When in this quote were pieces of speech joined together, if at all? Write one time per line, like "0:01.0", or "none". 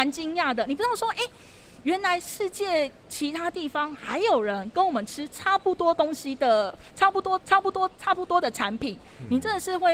0:07.4